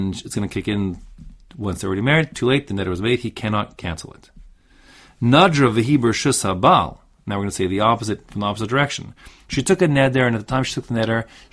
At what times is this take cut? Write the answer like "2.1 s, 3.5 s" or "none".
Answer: none

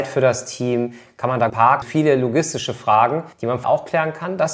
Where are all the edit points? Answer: 1.5 s, 1.8 s, 3.3 s, 3.6 s

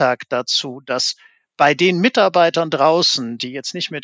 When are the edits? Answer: none

